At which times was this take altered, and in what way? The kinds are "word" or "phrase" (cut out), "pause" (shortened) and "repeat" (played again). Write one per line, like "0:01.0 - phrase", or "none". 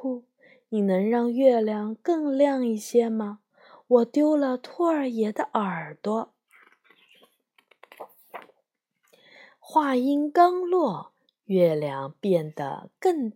none

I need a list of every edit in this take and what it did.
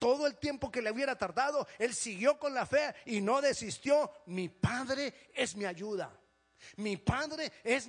none

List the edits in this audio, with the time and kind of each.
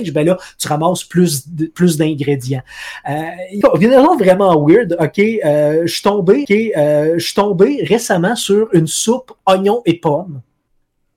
0:03.6 - phrase
0:06.4 - repeat

